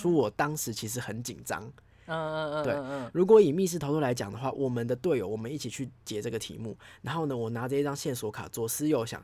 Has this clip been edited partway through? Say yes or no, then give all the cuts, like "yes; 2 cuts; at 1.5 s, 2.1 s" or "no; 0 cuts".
no; 0 cuts